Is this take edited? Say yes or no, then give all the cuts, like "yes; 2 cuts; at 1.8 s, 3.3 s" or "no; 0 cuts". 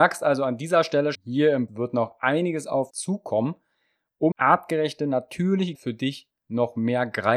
yes; 5 cuts; at 1.1 s, 1.7 s, 2.9 s, 4.3 s, 5.7 s